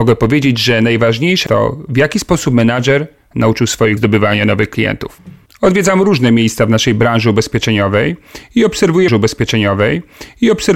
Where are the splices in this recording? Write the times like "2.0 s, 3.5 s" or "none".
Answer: 1.5 s, 4.0 s, 5.5 s, 9.1 s